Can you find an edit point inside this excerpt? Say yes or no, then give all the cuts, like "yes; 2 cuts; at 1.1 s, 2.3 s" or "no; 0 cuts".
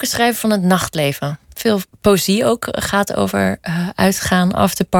no; 0 cuts